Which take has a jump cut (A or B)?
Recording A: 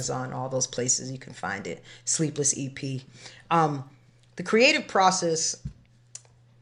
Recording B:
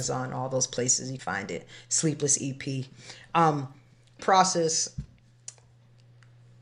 B